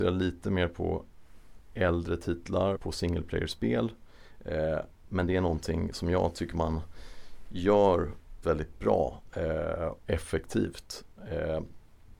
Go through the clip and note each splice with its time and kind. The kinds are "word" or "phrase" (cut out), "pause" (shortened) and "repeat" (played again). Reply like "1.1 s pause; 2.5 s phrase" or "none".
2.8 s word; 8.4 s word; 10.0 s word

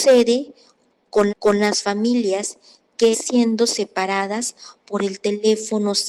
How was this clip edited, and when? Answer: 1.3 s repeat; 3.1 s word

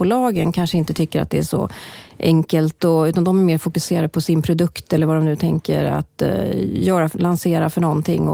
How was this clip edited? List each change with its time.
none

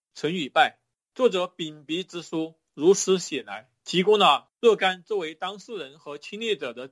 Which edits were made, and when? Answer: 3.8 s pause; 4.6 s pause

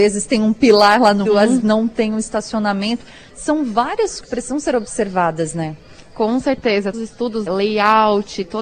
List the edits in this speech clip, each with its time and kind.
1.3 s word; 1.6 s word; 4.2 s word; 6.9 s word; 7.5 s word

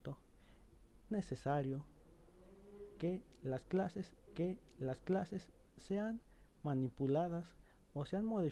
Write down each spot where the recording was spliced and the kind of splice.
1.1 s word; 4.3 s repeat

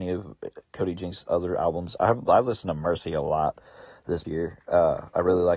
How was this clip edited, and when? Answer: 4.2 s word

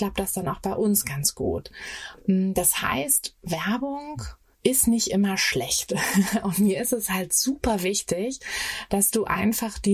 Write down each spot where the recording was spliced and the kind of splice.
4.5 s pause

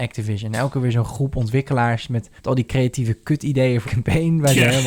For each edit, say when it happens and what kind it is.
2.4 s pause; 3.8 s word

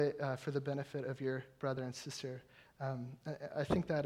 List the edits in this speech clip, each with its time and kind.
none

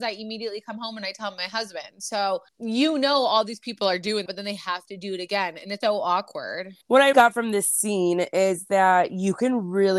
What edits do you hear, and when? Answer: 2.5 s pause; 4.3 s word; 5.8 s word; 6.8 s pause; 7.1 s word

